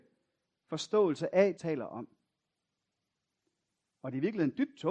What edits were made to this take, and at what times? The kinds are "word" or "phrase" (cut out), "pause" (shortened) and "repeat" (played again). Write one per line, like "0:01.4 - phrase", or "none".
0:01.6 - phrase